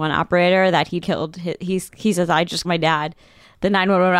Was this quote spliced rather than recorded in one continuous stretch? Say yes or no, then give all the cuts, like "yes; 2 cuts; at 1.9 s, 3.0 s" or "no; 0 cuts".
yes; 2 cuts; at 1.0 s, 2.6 s